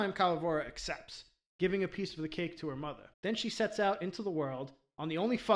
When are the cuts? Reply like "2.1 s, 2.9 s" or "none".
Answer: 3.1 s